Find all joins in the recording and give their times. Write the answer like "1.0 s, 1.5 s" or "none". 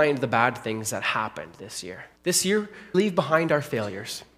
2.2 s, 2.9 s